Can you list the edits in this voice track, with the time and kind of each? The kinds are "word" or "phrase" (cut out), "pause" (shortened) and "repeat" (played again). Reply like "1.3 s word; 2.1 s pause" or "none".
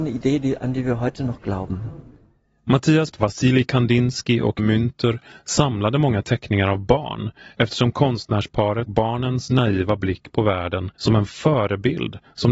3.1 s phrase; 4.6 s word; 8.9 s word; 11.0 s pause